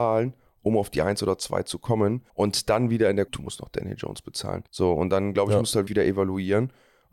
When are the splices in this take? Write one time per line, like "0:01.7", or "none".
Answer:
0:02.3
0:03.3
0:04.7
0:05.9